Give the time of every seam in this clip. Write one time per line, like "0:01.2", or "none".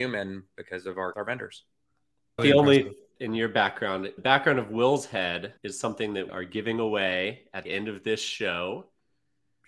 0:01.1
0:02.4
0:03.2
0:04.2
0:05.6
0:06.3
0:07.6